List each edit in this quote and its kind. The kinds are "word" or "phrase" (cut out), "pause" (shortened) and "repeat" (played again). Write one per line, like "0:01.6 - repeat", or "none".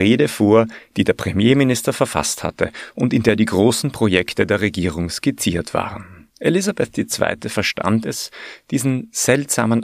0:06.3 - pause